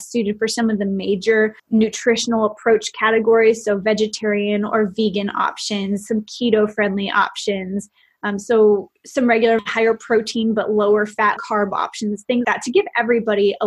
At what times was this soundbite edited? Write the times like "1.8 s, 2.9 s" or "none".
1.6 s, 9.6 s, 11.4 s, 12.4 s